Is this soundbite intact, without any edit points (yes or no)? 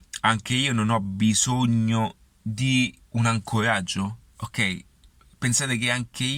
yes